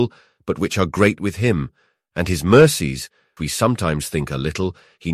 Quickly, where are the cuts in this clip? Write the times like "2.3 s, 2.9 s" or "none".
3.4 s